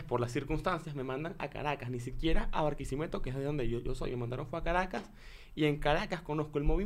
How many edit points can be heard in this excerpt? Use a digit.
0